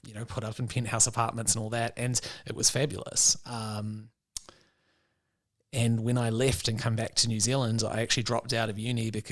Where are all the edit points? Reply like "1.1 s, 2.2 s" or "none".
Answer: none